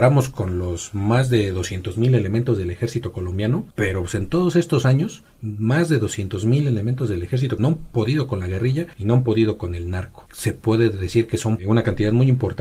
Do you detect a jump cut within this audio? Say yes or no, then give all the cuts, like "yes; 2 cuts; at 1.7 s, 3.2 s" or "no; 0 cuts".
yes; 5 cuts; at 3.7 s, 5.3 s, 7.6 s, 8.9 s, 11.6 s